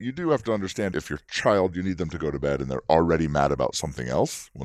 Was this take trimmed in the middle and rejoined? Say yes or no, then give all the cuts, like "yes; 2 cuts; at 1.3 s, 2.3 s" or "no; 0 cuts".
yes; 1 cut; at 0.9 s